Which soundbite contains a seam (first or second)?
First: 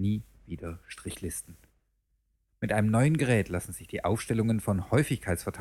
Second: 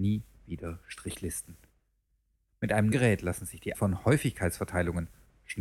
second